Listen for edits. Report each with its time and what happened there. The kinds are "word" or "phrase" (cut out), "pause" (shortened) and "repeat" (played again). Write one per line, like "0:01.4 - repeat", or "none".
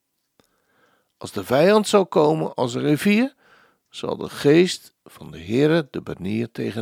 none